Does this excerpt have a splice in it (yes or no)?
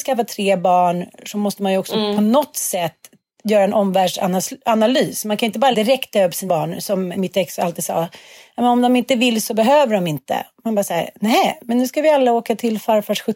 yes